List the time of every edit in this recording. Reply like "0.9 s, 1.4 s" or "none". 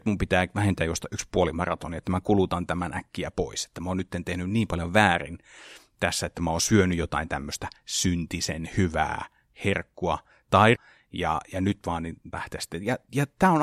10.8 s, 12.3 s